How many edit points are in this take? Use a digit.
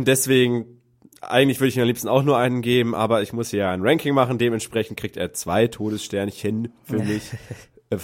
0